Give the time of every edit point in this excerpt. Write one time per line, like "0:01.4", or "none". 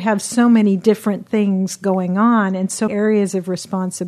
0:02.9